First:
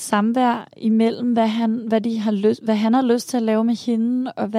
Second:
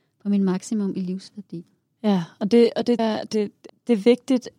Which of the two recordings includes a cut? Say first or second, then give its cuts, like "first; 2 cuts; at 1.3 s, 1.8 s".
second; 2 cuts; at 3.0 s, 3.7 s